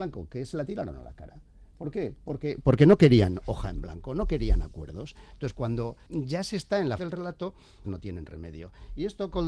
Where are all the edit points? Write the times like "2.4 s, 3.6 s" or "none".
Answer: 6.1 s, 7.0 s, 7.8 s

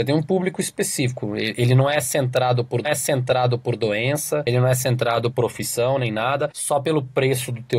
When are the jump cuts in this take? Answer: 2.8 s, 5.3 s, 6.5 s

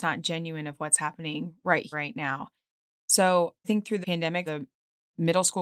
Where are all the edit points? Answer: 1.9 s, 3.6 s, 4.0 s, 4.5 s

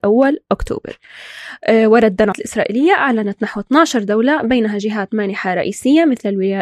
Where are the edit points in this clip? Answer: 2.3 s

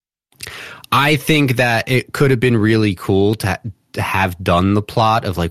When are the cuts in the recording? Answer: none

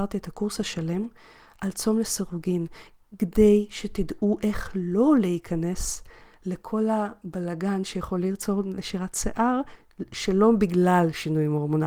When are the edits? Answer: none

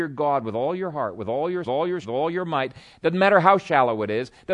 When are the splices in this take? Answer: 1.6 s, 2.0 s

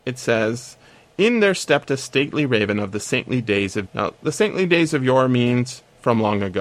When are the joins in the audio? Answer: 3.8 s

